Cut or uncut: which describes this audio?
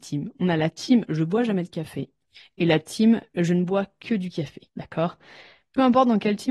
cut